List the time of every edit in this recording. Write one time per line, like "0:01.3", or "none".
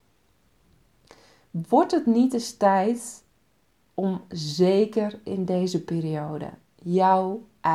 none